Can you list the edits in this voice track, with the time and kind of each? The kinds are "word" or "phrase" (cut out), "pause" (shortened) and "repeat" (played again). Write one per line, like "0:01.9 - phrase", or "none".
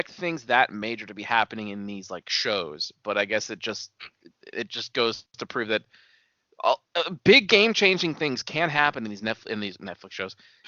0:06.8 - pause